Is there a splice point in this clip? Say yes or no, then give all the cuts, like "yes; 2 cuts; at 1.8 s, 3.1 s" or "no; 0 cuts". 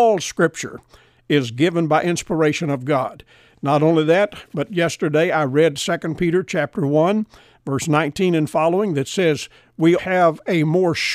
yes; 1 cut; at 10.0 s